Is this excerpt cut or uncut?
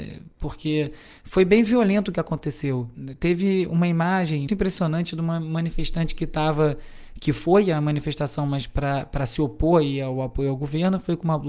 cut